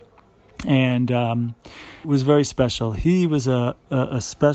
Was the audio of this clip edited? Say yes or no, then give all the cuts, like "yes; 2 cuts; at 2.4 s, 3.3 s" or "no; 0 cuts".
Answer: yes; 1 cut; at 2.0 s